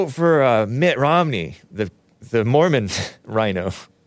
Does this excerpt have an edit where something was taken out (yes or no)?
no